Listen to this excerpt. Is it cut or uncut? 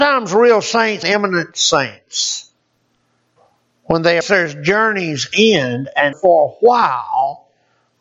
cut